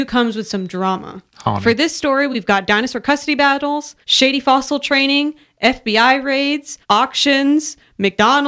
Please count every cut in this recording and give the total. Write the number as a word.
three